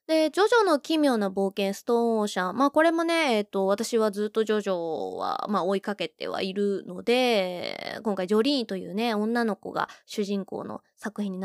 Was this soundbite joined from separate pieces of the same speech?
no; 0 cuts

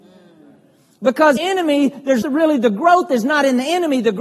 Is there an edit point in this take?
yes; 2 cuts; at 1.4 s, 2.2 s

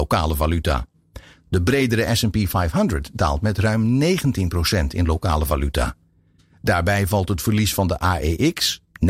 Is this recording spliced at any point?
no; 0 cuts

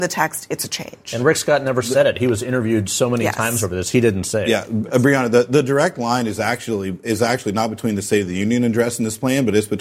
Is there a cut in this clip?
no; 0 cuts

